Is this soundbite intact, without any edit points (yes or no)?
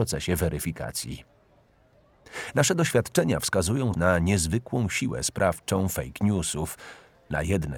no